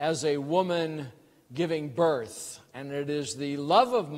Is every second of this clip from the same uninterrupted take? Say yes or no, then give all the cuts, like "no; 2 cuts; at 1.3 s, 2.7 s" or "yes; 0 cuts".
yes; 0 cuts